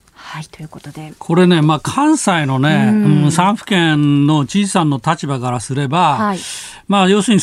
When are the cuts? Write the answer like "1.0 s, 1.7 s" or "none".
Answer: 1.2 s